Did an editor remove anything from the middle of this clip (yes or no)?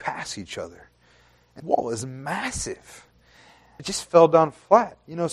yes